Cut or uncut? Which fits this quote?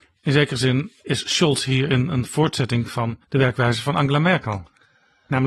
cut